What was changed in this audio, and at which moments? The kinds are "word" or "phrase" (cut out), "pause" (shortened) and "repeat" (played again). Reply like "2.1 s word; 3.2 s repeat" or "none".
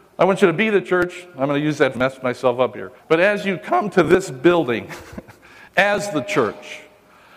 1.9 s phrase; 3.0 s pause